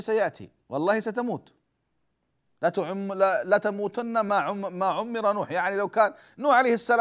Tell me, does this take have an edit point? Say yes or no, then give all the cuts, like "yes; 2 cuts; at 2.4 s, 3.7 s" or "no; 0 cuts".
no; 0 cuts